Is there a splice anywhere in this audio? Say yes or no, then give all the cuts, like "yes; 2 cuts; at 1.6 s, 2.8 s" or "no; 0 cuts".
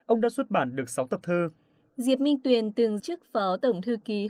yes; 1 cut; at 3.0 s